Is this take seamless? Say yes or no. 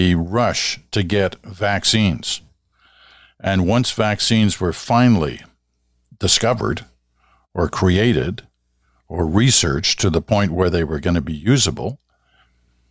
yes